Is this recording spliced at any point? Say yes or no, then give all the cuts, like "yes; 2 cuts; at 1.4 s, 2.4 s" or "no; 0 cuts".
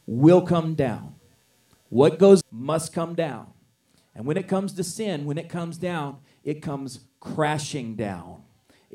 yes; 1 cut; at 2.4 s